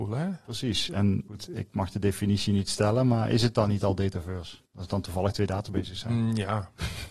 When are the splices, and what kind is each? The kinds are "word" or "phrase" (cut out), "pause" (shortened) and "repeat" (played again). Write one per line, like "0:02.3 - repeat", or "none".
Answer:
0:04.7 - pause